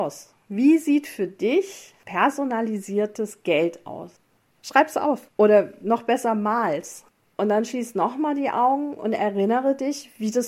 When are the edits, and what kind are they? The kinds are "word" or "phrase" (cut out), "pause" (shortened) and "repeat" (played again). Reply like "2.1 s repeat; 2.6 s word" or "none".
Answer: none